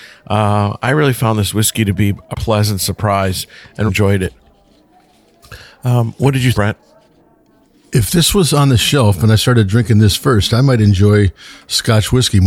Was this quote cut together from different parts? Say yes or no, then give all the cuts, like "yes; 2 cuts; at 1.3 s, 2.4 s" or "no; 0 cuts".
yes; 3 cuts; at 2.3 s, 3.9 s, 6.5 s